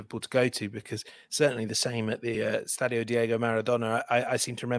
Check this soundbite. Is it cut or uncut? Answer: uncut